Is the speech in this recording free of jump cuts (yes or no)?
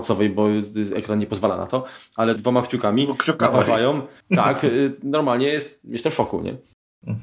no